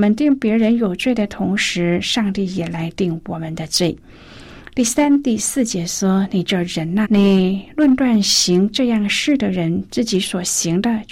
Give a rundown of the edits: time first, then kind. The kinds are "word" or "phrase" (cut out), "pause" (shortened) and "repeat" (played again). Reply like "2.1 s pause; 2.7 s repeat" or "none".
7.0 s word